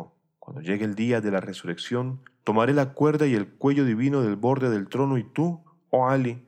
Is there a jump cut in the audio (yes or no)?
no